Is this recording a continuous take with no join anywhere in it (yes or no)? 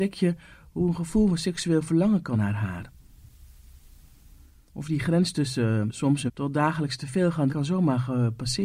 no